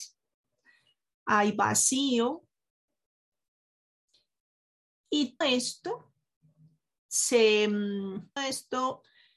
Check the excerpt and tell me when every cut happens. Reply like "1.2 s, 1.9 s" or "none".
5.4 s, 8.4 s

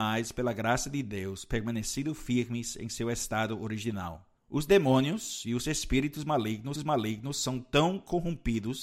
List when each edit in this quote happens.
4.4 s, 6.7 s

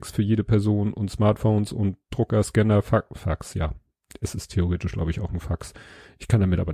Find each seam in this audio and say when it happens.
none

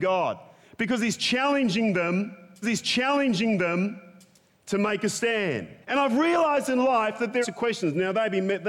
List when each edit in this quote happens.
2.6 s, 5.8 s, 7.4 s

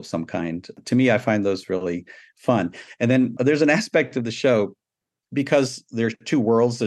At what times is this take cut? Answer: none

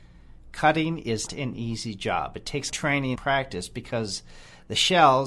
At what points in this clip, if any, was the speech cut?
1.3 s, 2.7 s, 3.2 s

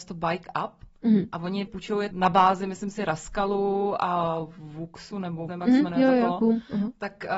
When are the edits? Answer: 1.7 s, 2.1 s, 5.5 s

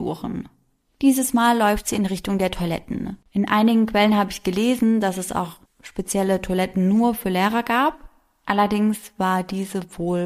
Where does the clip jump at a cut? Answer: 3.2 s, 5.7 s

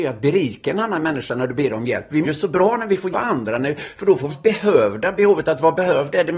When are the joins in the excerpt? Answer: 2.2 s, 3.1 s, 4.3 s

